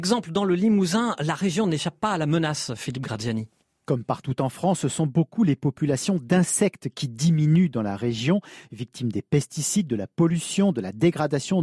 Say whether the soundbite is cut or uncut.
uncut